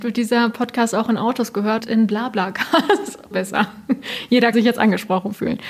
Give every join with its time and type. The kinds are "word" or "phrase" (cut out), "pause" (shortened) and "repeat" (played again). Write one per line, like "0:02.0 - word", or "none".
0:01.8 - word
0:03.3 - word
0:04.5 - word

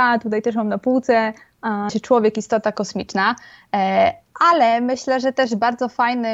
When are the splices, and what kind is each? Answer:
0:01.9 - word

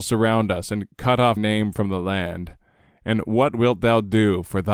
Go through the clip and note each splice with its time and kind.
0:01.4 - word

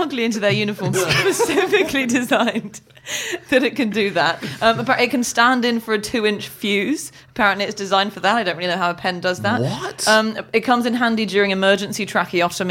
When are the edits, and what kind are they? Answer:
0:00.9 - word

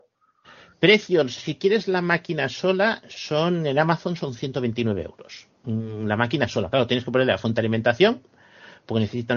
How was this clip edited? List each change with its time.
0:05.5 - pause

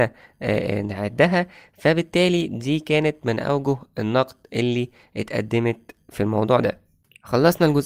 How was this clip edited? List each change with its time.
none

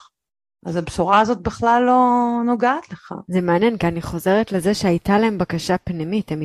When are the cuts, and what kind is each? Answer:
none

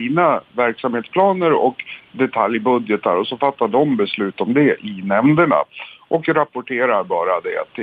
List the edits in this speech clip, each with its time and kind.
none

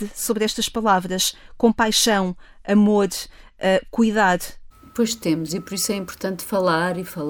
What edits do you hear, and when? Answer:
none

